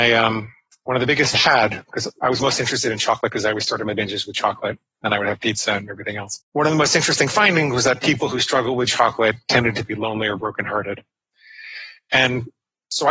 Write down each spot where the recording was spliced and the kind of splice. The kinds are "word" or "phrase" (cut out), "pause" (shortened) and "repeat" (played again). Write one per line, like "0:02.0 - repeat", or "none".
0:01.3 - phrase
0:06.5 - pause